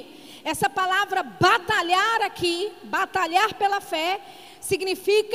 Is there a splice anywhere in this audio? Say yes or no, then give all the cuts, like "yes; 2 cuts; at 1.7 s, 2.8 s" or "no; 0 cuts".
no; 0 cuts